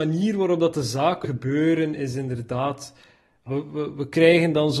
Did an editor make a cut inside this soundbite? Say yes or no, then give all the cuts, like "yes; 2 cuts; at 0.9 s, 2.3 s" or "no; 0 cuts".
yes; 2 cuts; at 1.2 s, 3.5 s